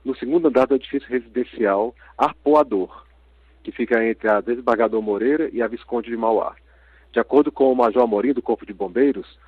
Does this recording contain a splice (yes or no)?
no